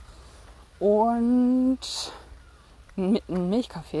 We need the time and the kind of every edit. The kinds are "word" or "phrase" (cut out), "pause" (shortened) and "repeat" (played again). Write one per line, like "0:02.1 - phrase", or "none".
0:02.9 - pause